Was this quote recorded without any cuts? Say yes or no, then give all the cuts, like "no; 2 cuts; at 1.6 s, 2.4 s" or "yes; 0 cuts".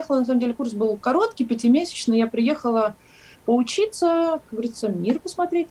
yes; 0 cuts